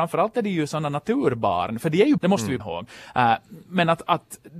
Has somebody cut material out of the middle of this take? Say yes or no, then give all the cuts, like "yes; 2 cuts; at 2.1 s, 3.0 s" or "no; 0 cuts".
yes; 2 cuts; at 2.2 s, 2.6 s